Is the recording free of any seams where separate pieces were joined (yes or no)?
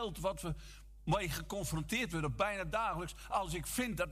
yes